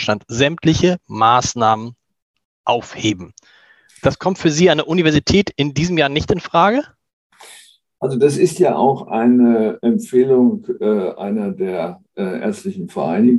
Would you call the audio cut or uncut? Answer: uncut